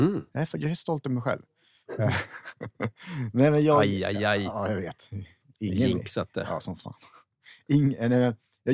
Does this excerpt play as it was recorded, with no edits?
yes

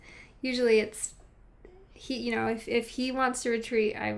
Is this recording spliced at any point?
no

